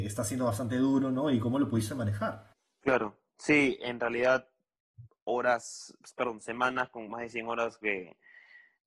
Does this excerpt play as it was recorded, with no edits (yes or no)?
no